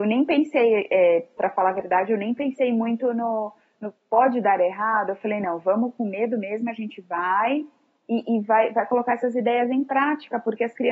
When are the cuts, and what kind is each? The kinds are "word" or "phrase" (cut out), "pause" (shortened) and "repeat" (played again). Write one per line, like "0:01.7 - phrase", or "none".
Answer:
none